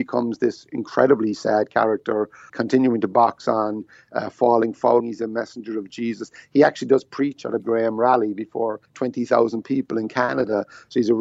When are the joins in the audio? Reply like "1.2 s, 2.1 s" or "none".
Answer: 2.5 s, 5.0 s, 7.6 s, 8.8 s